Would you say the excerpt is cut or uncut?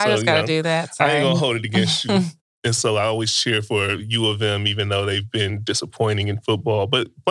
uncut